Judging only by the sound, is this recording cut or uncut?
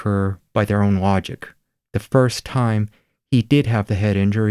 uncut